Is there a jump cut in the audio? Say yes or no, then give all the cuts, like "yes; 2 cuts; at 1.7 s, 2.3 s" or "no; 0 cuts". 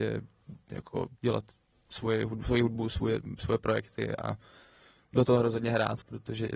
no; 0 cuts